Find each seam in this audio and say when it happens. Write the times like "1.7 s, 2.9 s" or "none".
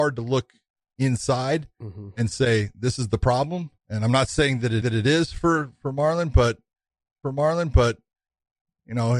3.8 s, 4.8 s, 7.2 s